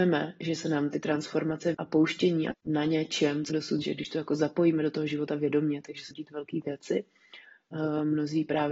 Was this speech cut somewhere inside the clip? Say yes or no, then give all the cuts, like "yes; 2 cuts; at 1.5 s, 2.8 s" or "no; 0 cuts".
yes; 5 cuts; at 1.7 s, 2.5 s, 3.5 s, 3.8 s, 6.1 s